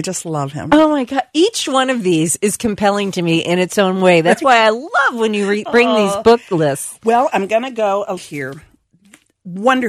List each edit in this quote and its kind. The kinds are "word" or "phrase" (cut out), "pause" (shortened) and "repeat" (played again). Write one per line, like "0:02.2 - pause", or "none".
0:08.2 - phrase